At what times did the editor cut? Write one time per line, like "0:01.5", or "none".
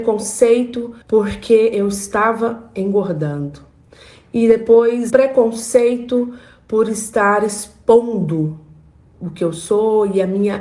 0:01.0
0:05.1